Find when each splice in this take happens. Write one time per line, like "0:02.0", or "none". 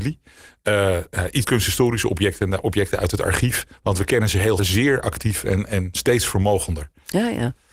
0:01.4
0:03.7
0:04.6